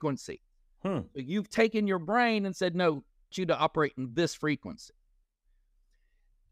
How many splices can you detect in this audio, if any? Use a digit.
1